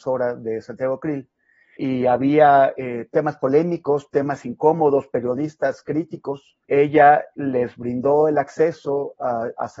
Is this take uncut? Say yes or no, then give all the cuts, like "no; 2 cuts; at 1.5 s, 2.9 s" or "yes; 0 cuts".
no; 2 cuts; at 1.8 s, 6.6 s